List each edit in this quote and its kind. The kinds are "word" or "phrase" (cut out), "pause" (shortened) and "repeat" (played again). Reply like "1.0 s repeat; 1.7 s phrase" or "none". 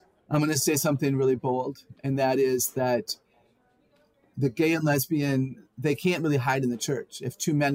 none